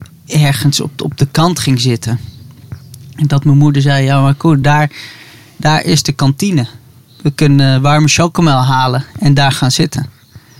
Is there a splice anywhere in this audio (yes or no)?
no